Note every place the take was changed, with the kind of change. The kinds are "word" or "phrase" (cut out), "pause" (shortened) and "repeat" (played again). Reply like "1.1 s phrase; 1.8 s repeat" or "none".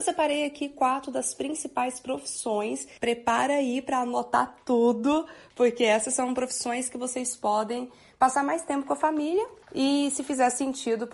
3.0 s pause; 9.6 s pause